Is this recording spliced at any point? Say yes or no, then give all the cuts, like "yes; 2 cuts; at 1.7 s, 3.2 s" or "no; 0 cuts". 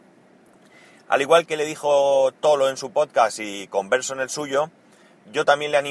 yes; 1 cut; at 1.4 s